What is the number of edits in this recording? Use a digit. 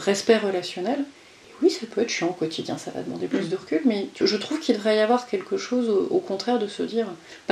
1